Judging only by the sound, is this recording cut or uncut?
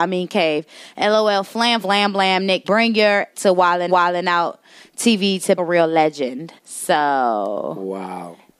cut